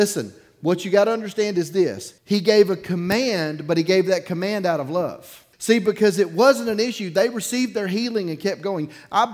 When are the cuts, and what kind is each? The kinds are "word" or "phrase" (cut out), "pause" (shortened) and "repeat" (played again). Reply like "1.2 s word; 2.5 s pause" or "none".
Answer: 2.2 s pause; 5.5 s pause